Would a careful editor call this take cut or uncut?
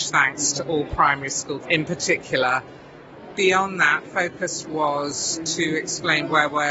cut